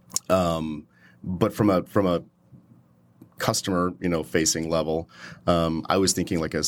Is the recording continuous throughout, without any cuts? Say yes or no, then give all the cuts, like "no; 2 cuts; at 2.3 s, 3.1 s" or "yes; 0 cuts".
yes; 0 cuts